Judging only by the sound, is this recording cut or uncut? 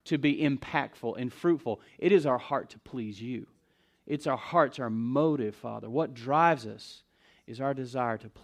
uncut